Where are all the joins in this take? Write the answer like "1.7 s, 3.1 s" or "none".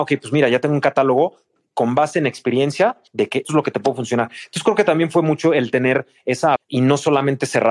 3.1 s, 3.4 s, 6.6 s